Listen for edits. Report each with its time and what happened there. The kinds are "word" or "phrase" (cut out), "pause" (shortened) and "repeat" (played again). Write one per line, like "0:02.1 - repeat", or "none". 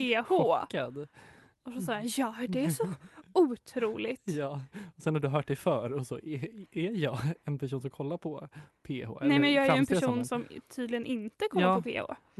none